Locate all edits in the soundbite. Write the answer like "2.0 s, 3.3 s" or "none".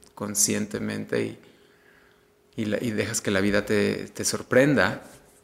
none